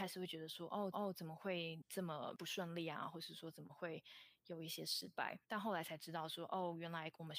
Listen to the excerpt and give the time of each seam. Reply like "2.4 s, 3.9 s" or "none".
0.9 s, 5.4 s